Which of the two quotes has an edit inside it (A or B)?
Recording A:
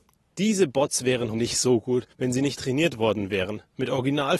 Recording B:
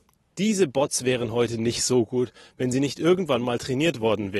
A